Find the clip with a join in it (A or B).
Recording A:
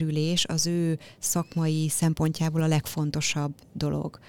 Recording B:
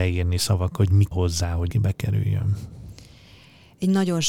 B